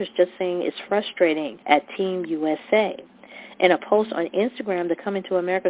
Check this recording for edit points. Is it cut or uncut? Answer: cut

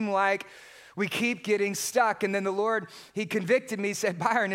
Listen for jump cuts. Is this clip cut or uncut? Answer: uncut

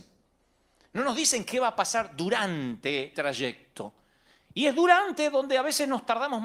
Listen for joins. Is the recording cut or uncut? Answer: cut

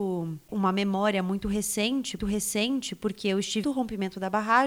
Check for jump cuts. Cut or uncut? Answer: cut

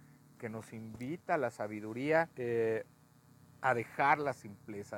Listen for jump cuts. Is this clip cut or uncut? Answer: cut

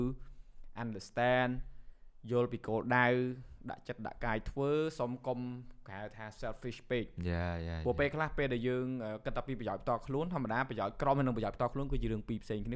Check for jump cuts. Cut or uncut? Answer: uncut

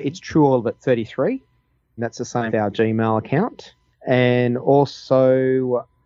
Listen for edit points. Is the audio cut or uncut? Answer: cut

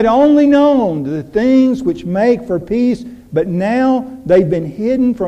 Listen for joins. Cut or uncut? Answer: uncut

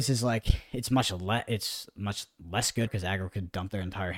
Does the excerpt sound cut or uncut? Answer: cut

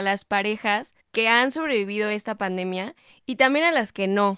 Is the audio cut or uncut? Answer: cut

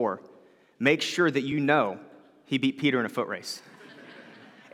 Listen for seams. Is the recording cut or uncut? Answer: uncut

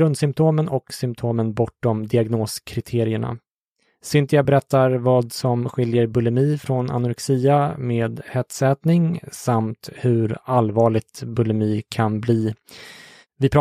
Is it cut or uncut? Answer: uncut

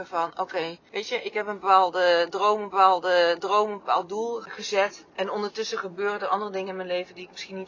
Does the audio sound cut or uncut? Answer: cut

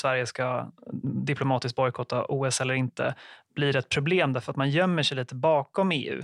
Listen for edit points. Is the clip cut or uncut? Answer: uncut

